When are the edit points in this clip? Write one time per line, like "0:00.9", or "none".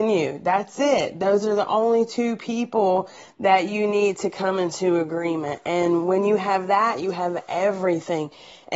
none